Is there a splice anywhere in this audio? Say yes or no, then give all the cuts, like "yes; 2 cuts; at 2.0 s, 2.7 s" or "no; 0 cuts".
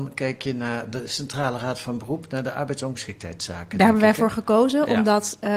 no; 0 cuts